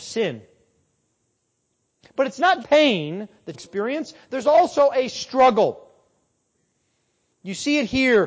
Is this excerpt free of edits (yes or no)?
no